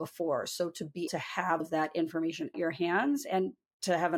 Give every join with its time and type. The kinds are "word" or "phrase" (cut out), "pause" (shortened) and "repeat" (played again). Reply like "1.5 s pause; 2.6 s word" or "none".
1.1 s word; 1.6 s word; 2.5 s word

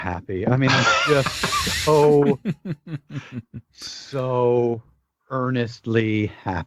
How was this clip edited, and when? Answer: none

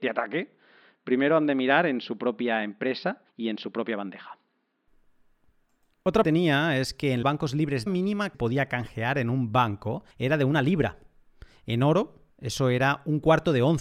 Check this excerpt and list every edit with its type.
3.3 s pause; 6.2 s phrase; 7.2 s phrase; 7.9 s phrase; 8.3 s word; 10.1 s pause; 12.3 s pause

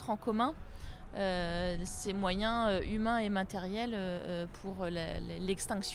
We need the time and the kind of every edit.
none

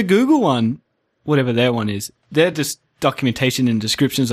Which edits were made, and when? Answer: none

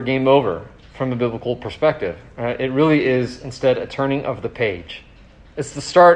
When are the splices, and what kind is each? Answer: none

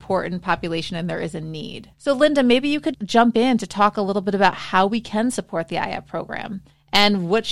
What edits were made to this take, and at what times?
1.9 s pause; 2.9 s word

